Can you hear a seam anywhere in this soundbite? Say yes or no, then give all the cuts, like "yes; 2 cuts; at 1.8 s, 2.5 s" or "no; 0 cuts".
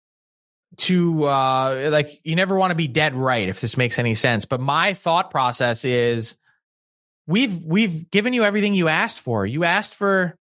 no; 0 cuts